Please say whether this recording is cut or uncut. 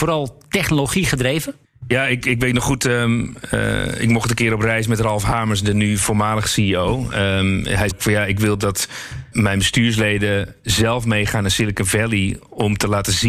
cut